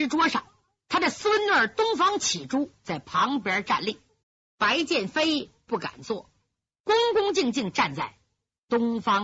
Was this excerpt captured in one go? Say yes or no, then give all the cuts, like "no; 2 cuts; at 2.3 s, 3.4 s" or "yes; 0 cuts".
no; 1 cut; at 4.2 s